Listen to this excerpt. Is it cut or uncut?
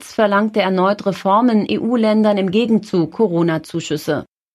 cut